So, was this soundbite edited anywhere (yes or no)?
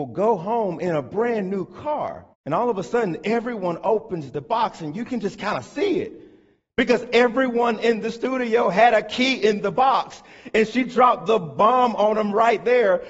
yes